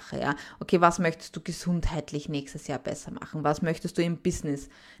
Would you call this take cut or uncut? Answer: uncut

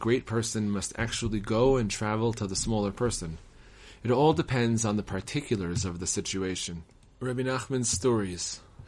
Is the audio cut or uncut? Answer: uncut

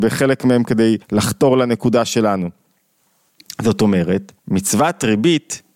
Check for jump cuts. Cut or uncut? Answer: cut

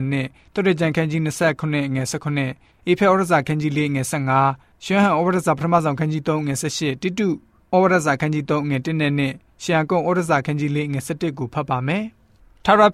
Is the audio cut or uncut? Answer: uncut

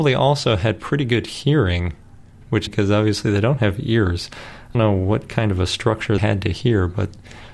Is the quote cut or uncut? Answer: cut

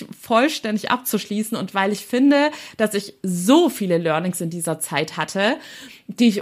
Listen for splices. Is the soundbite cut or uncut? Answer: uncut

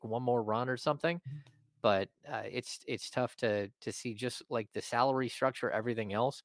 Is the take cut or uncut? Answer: uncut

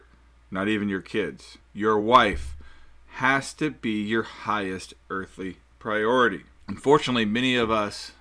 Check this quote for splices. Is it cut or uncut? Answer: uncut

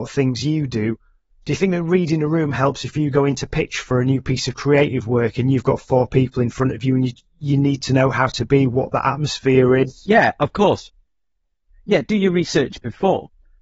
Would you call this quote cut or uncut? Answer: uncut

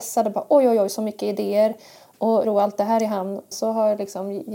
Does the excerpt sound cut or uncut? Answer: cut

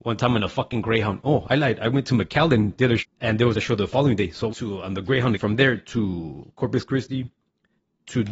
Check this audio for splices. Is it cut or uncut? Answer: cut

